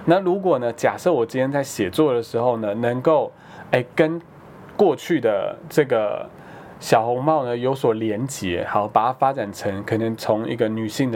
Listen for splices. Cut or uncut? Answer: uncut